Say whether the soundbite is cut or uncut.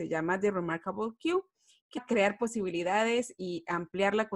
cut